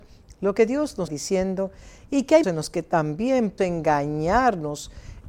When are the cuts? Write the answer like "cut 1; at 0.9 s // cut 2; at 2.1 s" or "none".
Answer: cut 1; at 1.1 s // cut 2; at 2.4 s // cut 3; at 3.6 s

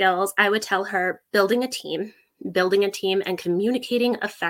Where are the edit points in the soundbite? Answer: none

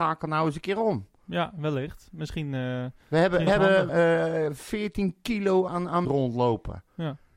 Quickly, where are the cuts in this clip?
cut 1; at 3.0 s // cut 2; at 3.5 s // cut 3; at 3.9 s // cut 4; at 5.7 s // cut 5; at 6.0 s

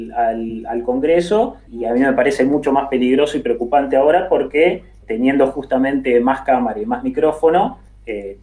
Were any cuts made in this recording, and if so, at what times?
cut 1; at 1.7 s // cut 2; at 5.0 s

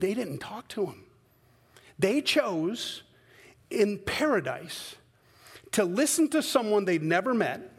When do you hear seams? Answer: none

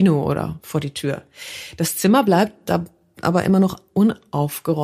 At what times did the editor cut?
none

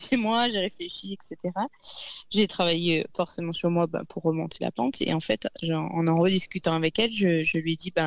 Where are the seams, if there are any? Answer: none

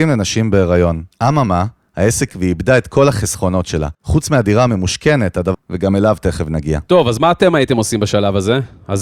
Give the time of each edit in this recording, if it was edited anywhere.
cut 1; at 2.3 s // cut 2; at 3.9 s // cut 3; at 5.5 s

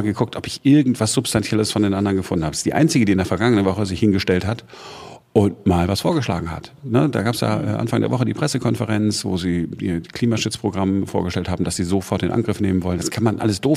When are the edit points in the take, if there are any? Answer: none

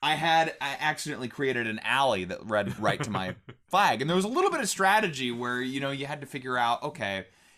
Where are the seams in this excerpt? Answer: cut 1; at 2.8 s

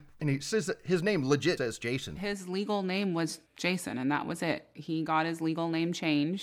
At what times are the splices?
cut 1; at 1.6 s

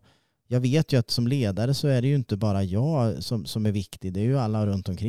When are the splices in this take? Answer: none

